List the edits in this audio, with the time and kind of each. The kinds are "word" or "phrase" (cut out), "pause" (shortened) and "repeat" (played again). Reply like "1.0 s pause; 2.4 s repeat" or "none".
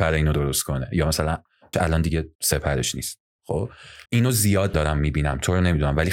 1.7 s word; 2.3 s pause; 4.1 s pause; 4.7 s word